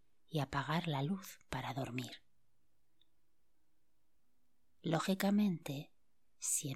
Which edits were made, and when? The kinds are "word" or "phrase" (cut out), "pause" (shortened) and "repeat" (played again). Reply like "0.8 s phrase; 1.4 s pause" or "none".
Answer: none